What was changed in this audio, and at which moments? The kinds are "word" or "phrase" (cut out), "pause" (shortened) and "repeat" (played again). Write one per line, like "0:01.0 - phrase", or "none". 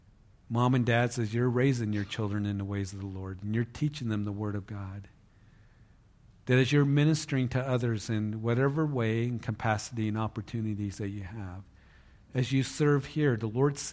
none

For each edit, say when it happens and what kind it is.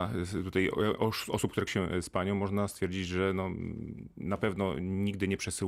0:01.7 - word

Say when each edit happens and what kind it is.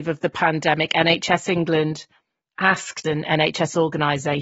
0:03.0 - word

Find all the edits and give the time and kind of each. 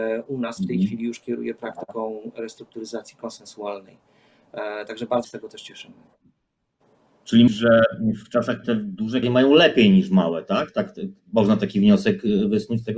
0:05.2 - word
0:07.5 - phrase
0:08.6 - word
0:09.2 - word

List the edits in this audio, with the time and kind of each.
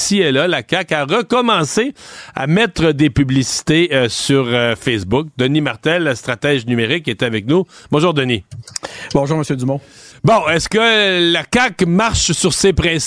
none

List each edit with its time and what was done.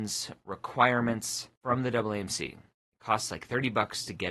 0:01.6 - pause

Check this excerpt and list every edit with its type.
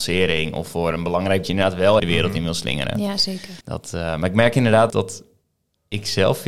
0:01.4 - phrase
0:02.0 - word
0:03.6 - pause
0:04.9 - word

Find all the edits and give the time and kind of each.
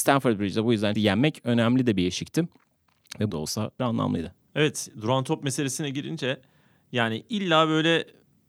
0:01.0 - word
0:03.3 - phrase
0:03.8 - word
0:04.5 - pause

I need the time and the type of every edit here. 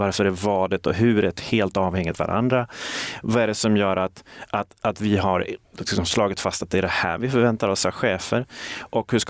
none

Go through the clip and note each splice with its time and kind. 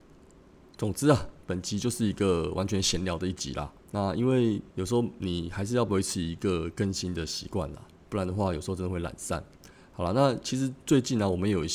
0:03.8 - pause
0:04.7 - pause

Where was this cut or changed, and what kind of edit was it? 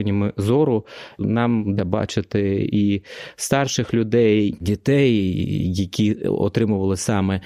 0:01.2 - word
0:01.8 - word
0:04.5 - word

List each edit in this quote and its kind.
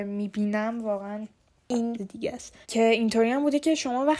0:02.0 - phrase
0:02.6 - pause

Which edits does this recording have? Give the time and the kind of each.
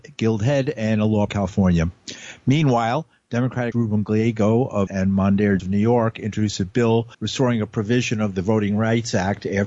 0:01.3 - phrase
0:03.7 - word
0:04.9 - word
0:05.6 - word
0:07.1 - pause

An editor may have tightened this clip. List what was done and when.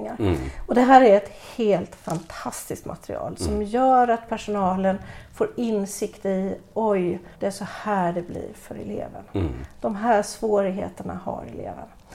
0:07.3 - pause

